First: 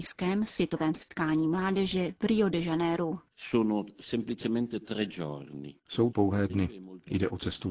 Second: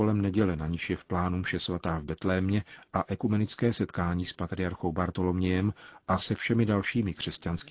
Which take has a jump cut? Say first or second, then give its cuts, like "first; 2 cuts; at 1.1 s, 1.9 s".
first; 2 cuts; at 6.1 s, 6.5 s